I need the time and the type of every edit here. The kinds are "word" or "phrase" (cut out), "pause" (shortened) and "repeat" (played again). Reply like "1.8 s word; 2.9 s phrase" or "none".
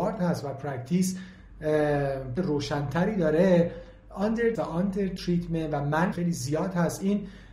2.4 s word; 4.5 s word; 6.1 s word